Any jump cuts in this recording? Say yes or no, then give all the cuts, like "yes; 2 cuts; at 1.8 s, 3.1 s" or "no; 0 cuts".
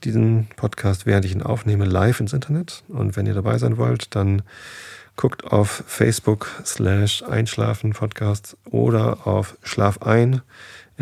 no; 0 cuts